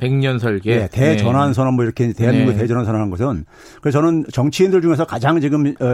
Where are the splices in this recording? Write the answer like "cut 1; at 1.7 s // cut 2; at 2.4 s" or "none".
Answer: none